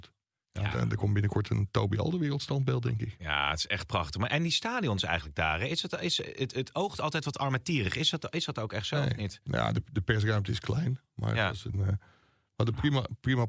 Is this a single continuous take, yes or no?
yes